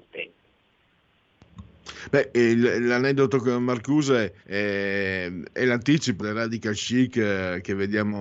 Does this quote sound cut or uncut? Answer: cut